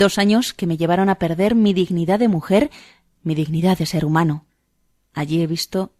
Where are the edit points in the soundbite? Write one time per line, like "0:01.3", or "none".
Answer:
none